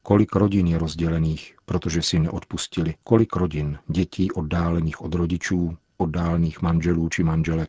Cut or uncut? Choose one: cut